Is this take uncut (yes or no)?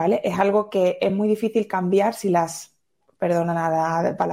yes